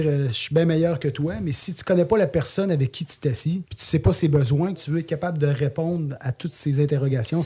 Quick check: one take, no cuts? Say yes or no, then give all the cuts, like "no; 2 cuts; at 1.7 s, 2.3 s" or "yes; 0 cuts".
no; 2 cuts; at 3.7 s, 4.8 s